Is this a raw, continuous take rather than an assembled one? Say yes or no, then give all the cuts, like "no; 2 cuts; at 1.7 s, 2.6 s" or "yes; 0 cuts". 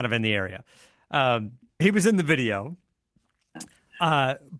no; 1 cut; at 1.8 s